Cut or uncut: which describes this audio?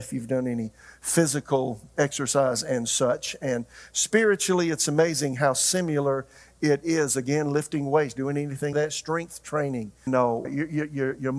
cut